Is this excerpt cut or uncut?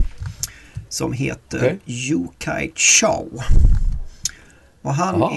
uncut